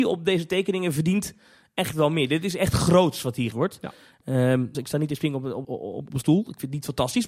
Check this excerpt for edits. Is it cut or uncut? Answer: cut